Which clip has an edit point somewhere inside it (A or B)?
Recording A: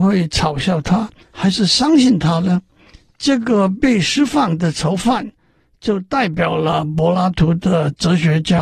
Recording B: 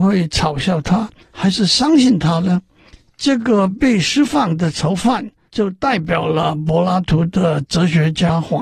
B